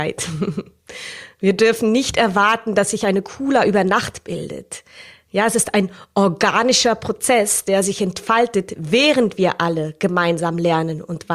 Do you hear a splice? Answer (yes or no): no